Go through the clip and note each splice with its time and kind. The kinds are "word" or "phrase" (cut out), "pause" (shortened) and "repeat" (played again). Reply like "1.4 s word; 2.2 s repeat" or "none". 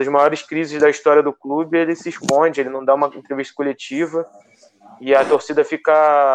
none